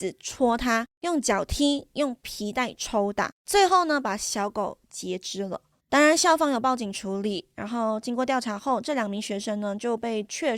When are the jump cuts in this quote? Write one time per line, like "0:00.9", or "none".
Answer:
0:00.9
0:03.4
0:05.8